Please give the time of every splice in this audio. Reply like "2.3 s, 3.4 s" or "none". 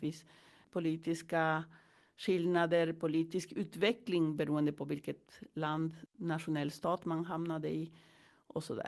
6.1 s